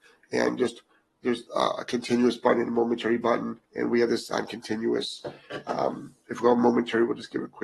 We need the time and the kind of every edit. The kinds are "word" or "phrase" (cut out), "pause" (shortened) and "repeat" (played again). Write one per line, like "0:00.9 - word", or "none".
0:01.5 - pause
0:03.6 - pause